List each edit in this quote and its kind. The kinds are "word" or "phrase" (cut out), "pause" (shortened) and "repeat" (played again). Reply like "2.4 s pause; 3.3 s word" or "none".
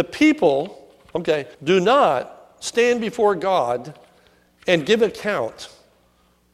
1.5 s pause